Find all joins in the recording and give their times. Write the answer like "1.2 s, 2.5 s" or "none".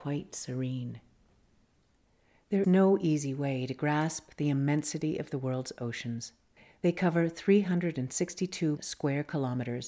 2.6 s, 8.8 s